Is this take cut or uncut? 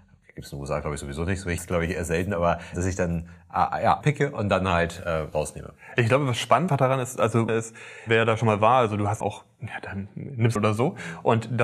cut